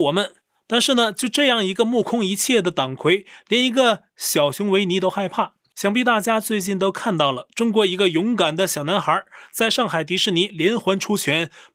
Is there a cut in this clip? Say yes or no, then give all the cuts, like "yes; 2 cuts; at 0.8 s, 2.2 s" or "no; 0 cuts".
no; 0 cuts